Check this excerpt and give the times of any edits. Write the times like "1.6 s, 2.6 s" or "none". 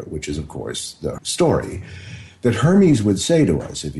1.2 s